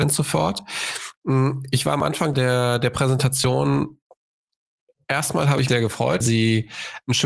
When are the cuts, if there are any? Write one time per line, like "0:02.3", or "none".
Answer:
0:02.3
0:05.7
0:06.2

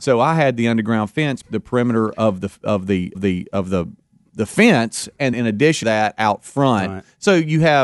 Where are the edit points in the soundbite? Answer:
0:01.4
0:03.1
0:05.3
0:05.8

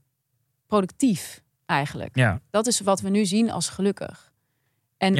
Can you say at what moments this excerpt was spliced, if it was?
0:01.5

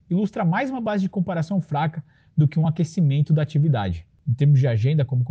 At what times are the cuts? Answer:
none

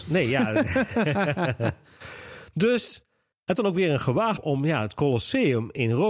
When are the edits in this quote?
0:03.6
0:04.4

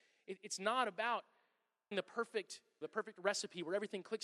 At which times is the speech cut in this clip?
0:01.9
0:02.8

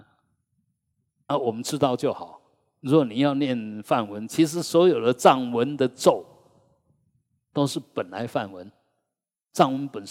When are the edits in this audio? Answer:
0:01.3

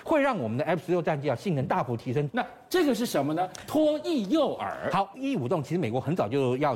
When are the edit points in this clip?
0:05.1

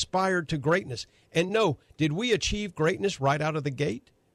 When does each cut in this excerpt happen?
none

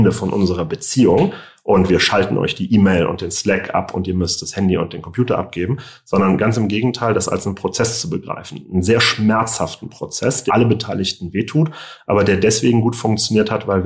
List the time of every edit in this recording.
0:10.5

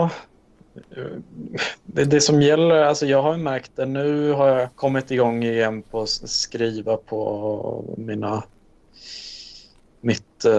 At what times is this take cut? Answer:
0:04.7

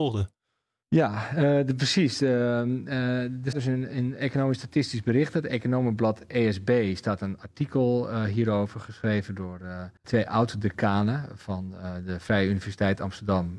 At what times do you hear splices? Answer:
0:03.5
0:10.0

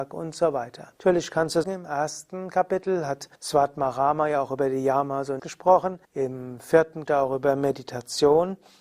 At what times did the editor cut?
0:01.0
0:01.6
0:03.3
0:05.4
0:06.0
0:07.1

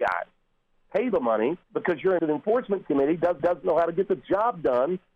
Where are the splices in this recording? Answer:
0:01.1
0:01.6
0:02.2
0:03.4

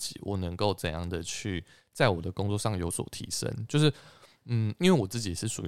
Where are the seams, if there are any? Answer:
none

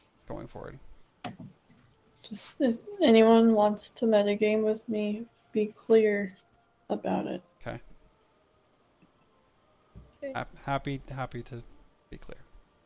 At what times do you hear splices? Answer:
none

